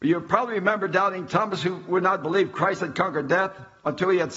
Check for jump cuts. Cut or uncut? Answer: uncut